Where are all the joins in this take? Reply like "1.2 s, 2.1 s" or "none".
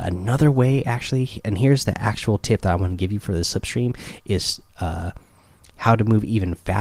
none